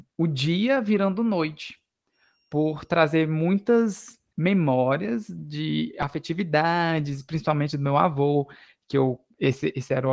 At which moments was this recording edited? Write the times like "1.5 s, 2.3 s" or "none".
none